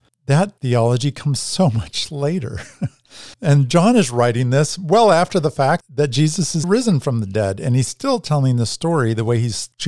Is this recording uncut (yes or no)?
no